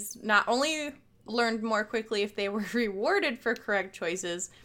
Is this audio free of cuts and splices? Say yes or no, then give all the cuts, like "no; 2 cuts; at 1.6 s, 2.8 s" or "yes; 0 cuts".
yes; 0 cuts